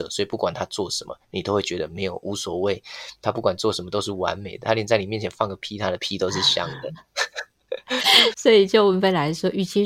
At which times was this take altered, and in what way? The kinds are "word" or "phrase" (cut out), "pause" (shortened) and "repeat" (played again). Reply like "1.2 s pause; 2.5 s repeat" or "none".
8.3 s word